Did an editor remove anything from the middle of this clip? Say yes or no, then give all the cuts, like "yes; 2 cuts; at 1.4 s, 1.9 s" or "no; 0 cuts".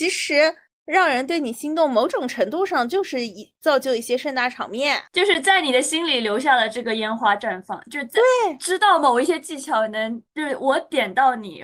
yes; 2 cuts; at 5.1 s, 10.3 s